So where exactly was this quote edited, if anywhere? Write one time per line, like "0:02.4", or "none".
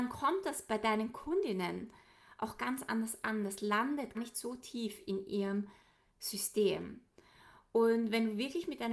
0:04.1